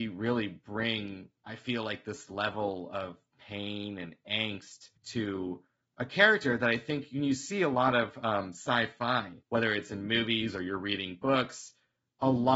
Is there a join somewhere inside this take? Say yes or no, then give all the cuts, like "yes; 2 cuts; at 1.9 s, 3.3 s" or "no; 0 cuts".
yes; 3 cuts; at 1.4 s, 5.0 s, 9.4 s